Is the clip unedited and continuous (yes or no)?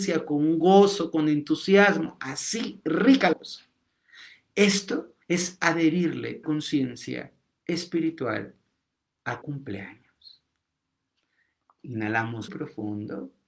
no